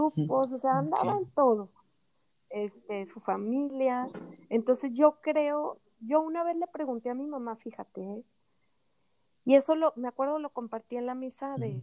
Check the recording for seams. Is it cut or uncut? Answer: uncut